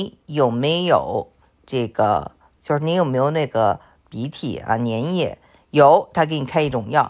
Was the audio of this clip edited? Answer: yes; 1 cut; at 2.6 s

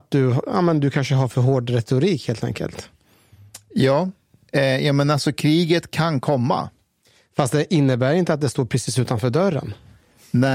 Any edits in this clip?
no; 0 cuts

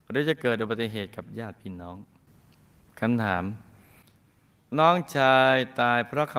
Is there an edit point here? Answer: no; 0 cuts

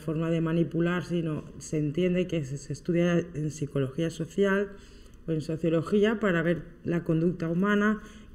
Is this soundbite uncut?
yes; 0 cuts

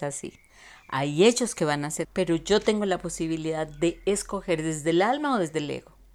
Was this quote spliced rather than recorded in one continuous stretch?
yes; 1 cut; at 2.0 s

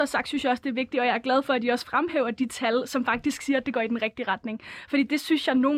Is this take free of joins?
yes; 0 cuts

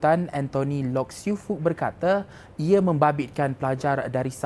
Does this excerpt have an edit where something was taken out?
no; 0 cuts

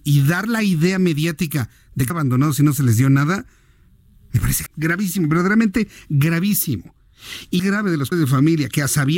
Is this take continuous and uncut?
no; 4 cuts; at 2.1 s, 4.7 s, 7.6 s, 8.1 s

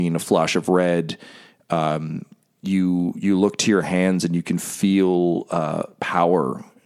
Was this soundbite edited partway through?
no; 0 cuts

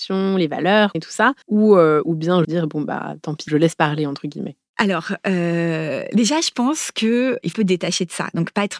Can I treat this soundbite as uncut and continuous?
no; 5 cuts; at 0.9 s, 1.4 s, 2.4 s, 3.5 s, 7.5 s

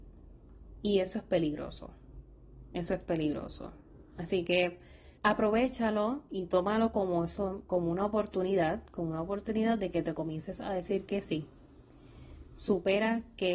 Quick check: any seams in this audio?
yes; 1 cut; at 5.2 s

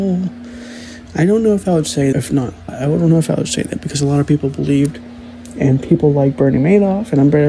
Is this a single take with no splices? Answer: no; 2 cuts; at 2.1 s, 2.7 s

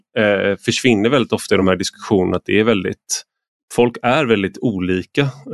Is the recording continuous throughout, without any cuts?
yes; 0 cuts

